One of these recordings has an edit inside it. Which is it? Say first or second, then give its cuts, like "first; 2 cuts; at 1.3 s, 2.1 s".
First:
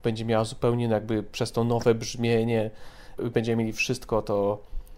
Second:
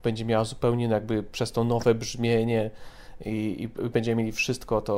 first; 1 cut; at 3.2 s